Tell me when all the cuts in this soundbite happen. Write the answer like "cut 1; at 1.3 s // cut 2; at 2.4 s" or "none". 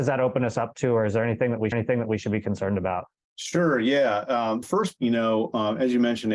cut 1; at 1.7 s // cut 2; at 3.2 s // cut 3; at 4.6 s // cut 4; at 5.0 s